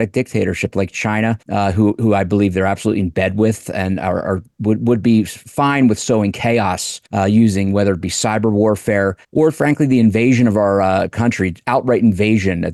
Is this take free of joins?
no; 3 cuts; at 1.4 s, 7.1 s, 9.2 s

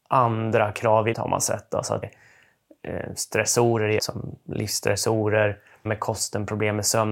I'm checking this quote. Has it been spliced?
yes; 4 cuts; at 1.1 s, 2.0 s, 4.0 s, 5.9 s

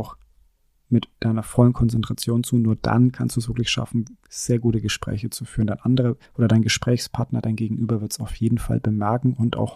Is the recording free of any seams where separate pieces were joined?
no; 1 cut; at 6.3 s

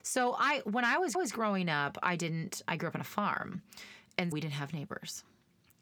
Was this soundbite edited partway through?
yes; 2 cuts; at 1.1 s, 4.3 s

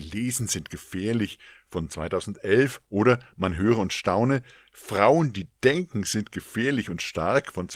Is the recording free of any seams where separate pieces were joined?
yes; 0 cuts

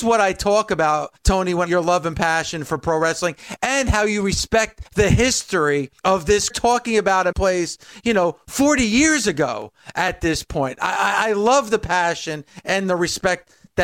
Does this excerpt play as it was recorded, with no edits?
no; 6 cuts; at 1.2 s, 1.7 s, 4.8 s, 6.0 s, 6.5 s, 7.3 s

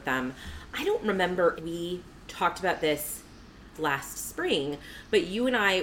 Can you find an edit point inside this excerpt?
yes; 2 cuts; at 1.6 s, 3.7 s

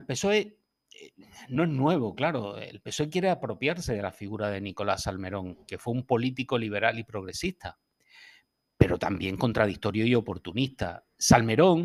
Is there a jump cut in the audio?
no; 0 cuts

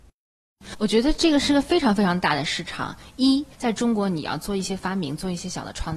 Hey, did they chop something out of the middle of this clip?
yes; 1 cut; at 3.5 s

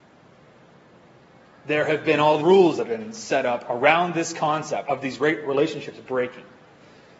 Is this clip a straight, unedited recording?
no; 3 cuts; at 2.4 s, 2.8 s, 4.8 s

